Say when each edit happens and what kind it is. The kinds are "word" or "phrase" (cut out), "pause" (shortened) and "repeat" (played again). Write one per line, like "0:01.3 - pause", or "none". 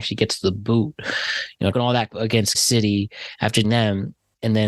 0:01.7 - word
0:02.1 - word
0:02.5 - word
0:03.6 - word